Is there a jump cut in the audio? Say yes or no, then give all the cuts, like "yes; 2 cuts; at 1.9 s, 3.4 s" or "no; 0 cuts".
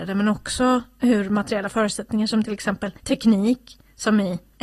yes; 1 cut; at 3.0 s